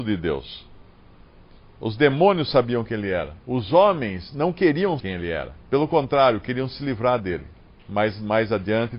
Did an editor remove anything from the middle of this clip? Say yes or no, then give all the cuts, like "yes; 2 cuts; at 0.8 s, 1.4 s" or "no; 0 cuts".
yes; 4 cuts; at 3.4 s, 5.0 s, 5.6 s, 7.6 s